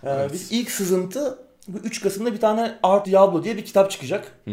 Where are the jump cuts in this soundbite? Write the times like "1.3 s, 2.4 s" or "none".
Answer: 3.0 s